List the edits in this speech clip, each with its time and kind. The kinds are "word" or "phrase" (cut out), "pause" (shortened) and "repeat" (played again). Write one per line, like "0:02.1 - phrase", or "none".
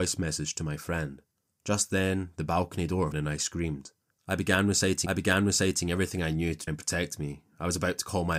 0:01.4 - pause
0:03.1 - phrase
0:04.1 - pause
0:05.1 - repeat
0:06.7 - word